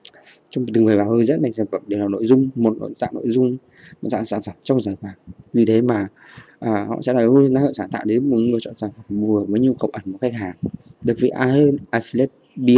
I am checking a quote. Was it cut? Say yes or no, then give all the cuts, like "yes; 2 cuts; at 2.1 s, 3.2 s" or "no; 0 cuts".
no; 0 cuts